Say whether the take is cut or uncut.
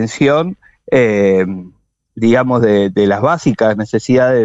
uncut